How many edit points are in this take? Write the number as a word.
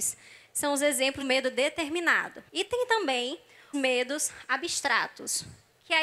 three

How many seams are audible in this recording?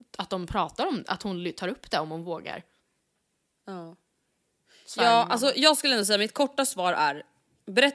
zero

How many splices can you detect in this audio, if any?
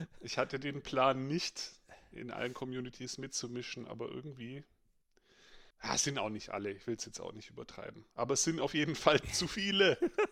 two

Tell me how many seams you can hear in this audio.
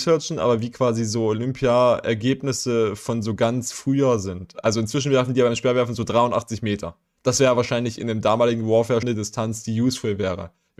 one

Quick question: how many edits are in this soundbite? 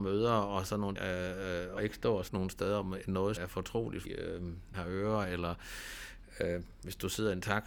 six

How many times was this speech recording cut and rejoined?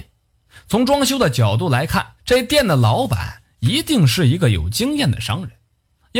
one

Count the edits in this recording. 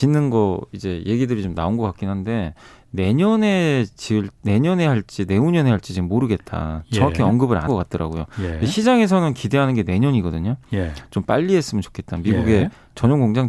one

